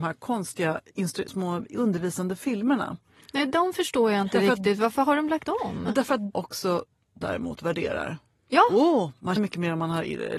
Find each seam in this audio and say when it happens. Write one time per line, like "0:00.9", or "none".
0:01.3
0:05.5
0:06.3
0:07.2
0:09.4